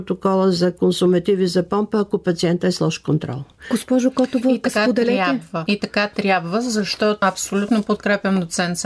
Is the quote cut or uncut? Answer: uncut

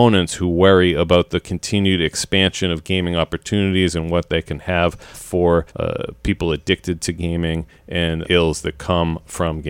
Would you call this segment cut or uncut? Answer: cut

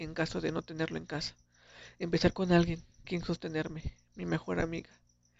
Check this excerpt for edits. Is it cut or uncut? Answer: cut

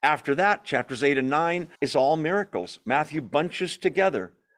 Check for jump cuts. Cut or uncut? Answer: cut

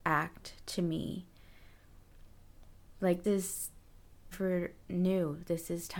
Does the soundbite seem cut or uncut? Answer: cut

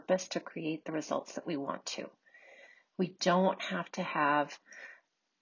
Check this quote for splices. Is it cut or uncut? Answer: uncut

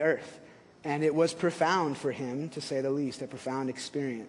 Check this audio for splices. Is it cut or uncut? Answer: uncut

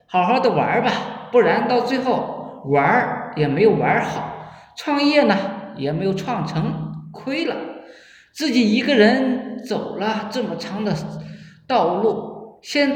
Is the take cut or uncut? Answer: uncut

